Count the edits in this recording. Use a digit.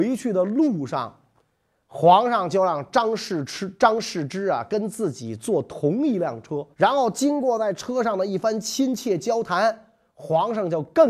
1